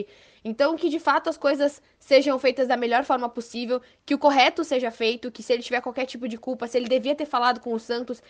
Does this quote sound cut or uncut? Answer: uncut